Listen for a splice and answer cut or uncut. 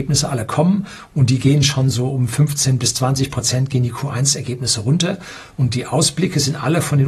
uncut